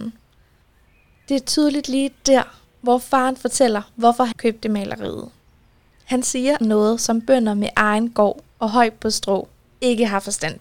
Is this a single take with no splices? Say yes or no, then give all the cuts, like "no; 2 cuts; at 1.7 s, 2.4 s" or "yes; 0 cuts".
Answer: no; 2 cuts; at 4.3 s, 6.6 s